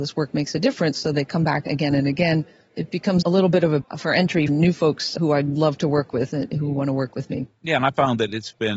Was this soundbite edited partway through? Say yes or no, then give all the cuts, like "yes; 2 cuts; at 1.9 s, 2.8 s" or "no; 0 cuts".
yes; 4 cuts; at 3.2 s, 3.8 s, 4.5 s, 5.2 s